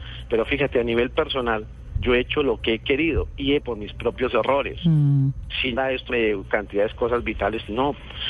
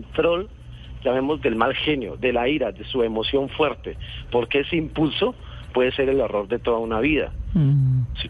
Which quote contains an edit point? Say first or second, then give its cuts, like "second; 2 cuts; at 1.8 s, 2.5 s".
first; 3 cuts; at 3.6 s, 5.8 s, 6.1 s